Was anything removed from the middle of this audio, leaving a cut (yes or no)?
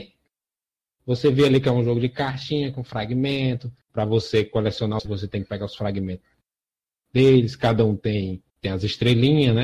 yes